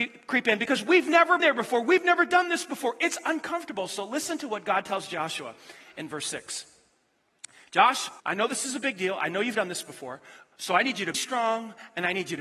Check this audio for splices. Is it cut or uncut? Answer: cut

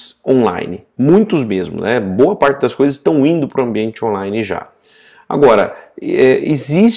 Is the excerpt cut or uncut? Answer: uncut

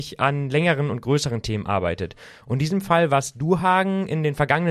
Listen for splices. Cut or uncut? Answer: uncut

